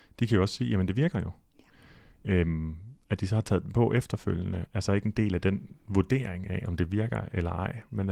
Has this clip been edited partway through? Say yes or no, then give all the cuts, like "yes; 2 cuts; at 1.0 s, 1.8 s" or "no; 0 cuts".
no; 0 cuts